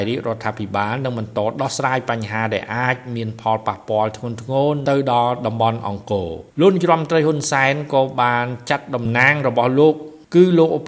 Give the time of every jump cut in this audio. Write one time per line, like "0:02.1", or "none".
0:06.5